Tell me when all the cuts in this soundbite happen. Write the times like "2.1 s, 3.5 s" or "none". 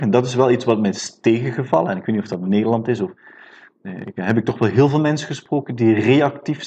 none